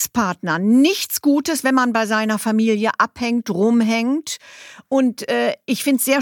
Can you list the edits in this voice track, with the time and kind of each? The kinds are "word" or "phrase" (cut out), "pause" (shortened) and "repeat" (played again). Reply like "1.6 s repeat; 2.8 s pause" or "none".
none